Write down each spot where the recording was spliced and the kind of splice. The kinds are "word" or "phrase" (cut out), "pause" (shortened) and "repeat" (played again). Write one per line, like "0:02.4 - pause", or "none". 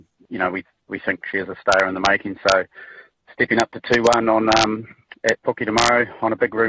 none